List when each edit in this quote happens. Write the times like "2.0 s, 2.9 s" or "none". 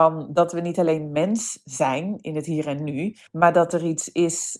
3.3 s